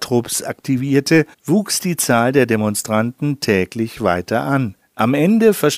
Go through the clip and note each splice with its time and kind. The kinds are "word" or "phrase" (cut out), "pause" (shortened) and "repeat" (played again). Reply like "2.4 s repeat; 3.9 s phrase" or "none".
1.3 s pause; 4.8 s pause